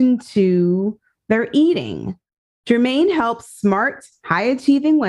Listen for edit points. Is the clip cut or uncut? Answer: uncut